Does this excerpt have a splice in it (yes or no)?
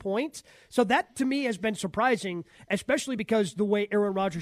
no